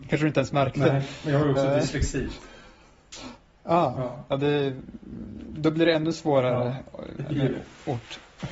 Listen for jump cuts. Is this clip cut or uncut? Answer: uncut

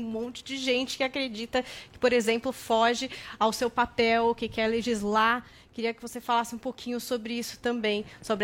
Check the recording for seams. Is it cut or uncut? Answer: uncut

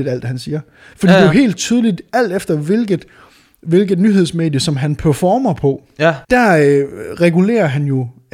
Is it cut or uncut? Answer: cut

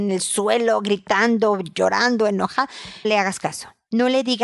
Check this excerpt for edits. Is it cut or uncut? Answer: cut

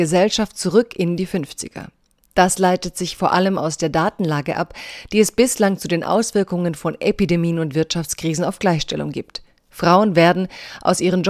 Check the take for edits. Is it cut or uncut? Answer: uncut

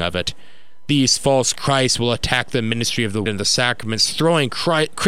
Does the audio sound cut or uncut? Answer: cut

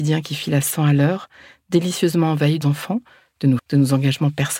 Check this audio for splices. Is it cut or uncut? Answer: cut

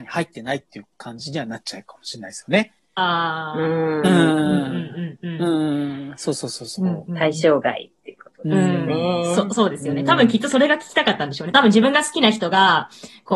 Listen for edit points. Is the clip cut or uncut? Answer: uncut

